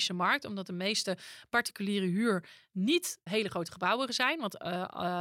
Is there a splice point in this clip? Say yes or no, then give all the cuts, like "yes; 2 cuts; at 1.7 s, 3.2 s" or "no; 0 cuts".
yes; 1 cut; at 3.3 s